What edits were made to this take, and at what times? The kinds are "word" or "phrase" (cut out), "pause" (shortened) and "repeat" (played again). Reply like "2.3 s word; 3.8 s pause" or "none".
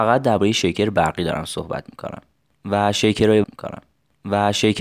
3.4 s repeat